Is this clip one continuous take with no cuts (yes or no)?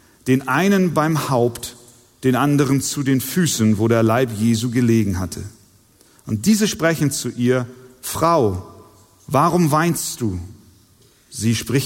yes